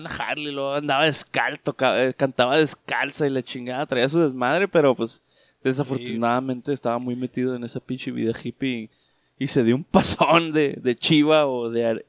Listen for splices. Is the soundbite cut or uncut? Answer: uncut